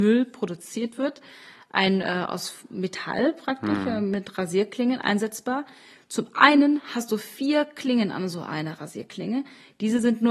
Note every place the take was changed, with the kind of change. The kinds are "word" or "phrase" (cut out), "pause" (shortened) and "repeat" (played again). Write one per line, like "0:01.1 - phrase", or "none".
none